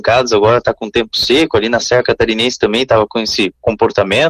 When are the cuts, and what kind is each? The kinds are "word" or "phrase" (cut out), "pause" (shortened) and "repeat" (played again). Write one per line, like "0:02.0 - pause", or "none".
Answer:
none